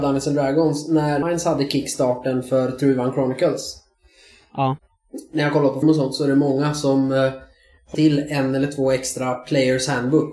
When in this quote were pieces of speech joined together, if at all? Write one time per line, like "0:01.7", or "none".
0:01.2
0:05.8
0:07.9